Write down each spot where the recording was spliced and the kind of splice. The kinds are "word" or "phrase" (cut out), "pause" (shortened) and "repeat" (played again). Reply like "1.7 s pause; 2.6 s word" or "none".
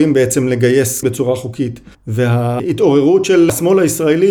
1.0 s word